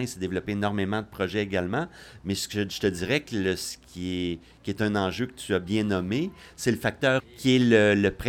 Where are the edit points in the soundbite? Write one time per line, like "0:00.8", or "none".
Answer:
0:07.2